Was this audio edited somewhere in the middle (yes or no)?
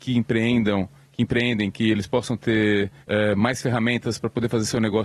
yes